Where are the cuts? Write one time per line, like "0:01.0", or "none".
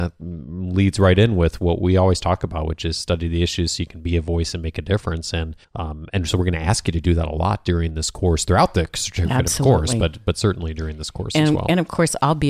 0:05.6